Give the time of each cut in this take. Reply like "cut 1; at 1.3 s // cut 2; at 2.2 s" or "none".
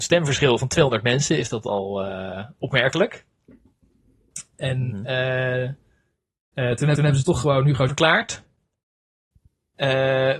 cut 1; at 7.0 s // cut 2; at 7.9 s